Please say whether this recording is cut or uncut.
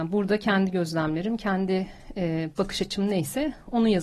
uncut